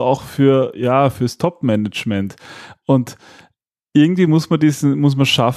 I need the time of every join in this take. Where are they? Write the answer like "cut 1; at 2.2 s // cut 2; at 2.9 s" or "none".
none